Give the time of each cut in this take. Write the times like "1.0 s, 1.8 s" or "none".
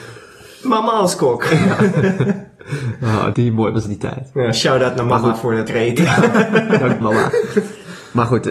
3.3 s, 5.7 s, 7.0 s

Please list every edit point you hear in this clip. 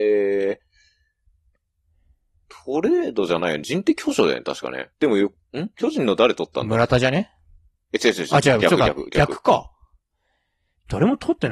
4.9 s

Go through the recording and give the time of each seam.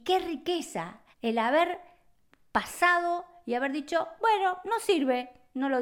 1.1 s

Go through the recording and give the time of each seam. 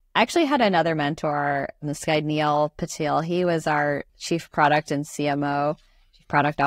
4.1 s

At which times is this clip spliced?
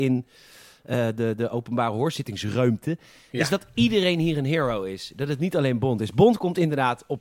none

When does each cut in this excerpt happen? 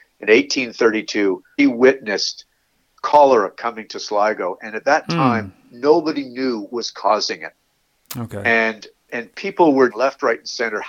1.6 s, 6.7 s, 9.1 s, 9.9 s

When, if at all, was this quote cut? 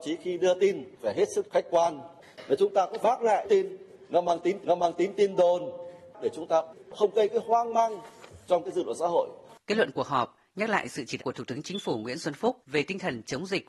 1.0 s, 1.5 s, 3.0 s, 3.4 s, 4.6 s, 9.6 s, 11.2 s, 12.6 s

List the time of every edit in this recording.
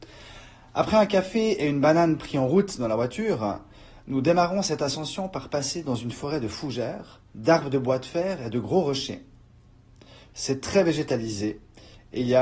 7.3 s

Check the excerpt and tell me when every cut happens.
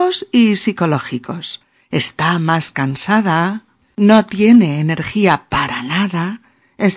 none

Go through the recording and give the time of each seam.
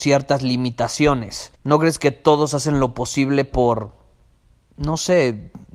1.6 s

